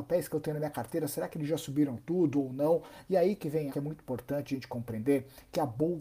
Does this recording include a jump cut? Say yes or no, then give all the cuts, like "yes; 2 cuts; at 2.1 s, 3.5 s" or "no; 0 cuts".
yes; 1 cut; at 3.7 s